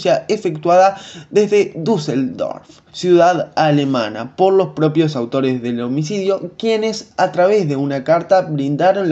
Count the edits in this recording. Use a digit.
1